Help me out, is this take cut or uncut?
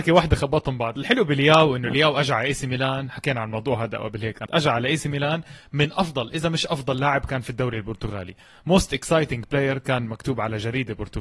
cut